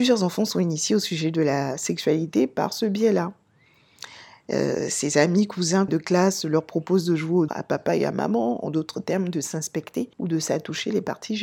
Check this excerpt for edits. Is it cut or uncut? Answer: cut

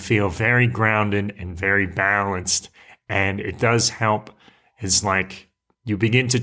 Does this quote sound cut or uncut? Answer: uncut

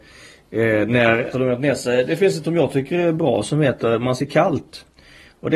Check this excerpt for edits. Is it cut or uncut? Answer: cut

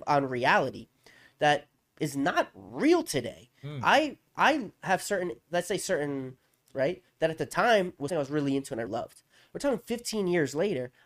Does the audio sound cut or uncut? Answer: cut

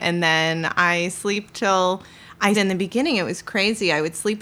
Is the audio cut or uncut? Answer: cut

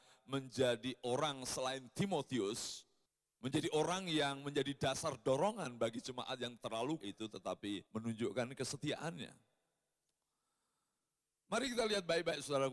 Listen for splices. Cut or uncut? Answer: cut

